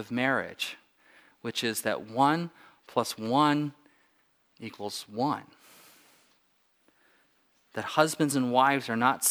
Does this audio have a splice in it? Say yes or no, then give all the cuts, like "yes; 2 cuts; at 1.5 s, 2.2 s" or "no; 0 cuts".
no; 0 cuts